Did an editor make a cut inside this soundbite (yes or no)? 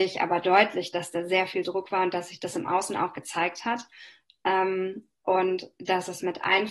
no